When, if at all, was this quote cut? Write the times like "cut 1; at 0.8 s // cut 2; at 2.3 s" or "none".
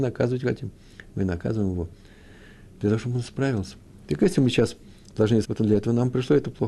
cut 1; at 5.4 s